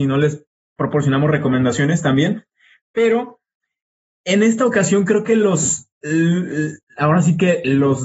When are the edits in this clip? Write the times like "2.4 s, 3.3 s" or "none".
none